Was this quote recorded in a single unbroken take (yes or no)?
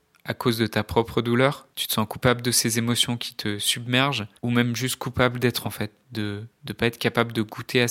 no